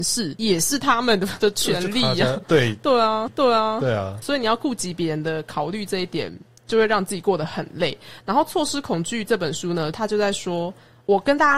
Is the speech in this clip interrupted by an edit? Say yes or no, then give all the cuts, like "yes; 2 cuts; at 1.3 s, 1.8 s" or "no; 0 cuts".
yes; 2 cuts; at 3.3 s, 4.2 s